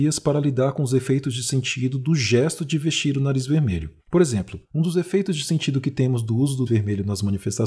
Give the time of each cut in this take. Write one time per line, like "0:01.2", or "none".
0:04.0
0:04.6
0:06.7